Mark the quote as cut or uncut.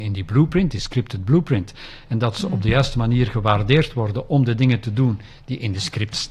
uncut